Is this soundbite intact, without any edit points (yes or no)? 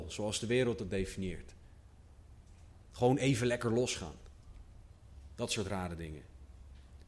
yes